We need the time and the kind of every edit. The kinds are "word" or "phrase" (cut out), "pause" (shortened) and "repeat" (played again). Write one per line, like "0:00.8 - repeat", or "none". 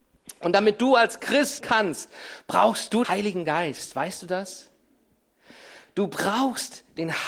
0:01.6 - word
0:03.0 - word